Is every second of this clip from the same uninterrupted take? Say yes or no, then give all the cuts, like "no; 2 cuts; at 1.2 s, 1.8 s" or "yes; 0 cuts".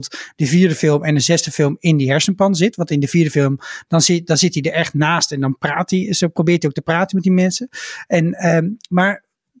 yes; 0 cuts